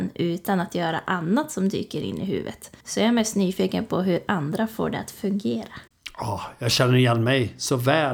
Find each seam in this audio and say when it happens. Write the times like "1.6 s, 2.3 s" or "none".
2.8 s